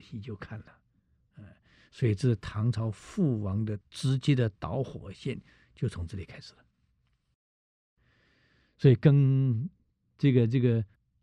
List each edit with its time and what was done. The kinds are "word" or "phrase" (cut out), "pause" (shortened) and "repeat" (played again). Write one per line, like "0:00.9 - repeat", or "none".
0:03.8 - pause